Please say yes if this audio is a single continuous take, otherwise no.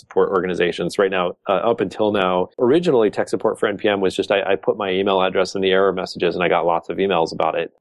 no